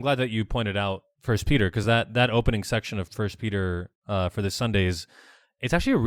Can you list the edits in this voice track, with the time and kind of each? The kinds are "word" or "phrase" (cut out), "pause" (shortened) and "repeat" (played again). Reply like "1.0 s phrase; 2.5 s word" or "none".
none